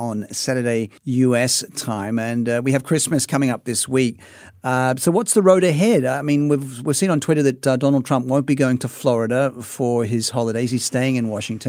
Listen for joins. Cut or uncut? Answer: cut